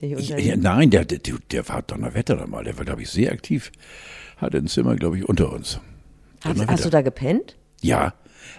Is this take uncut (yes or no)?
yes